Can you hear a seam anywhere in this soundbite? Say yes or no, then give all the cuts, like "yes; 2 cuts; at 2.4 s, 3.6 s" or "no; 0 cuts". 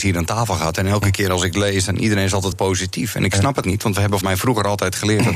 yes; 3 cuts; at 2.5 s, 3.6 s, 4.2 s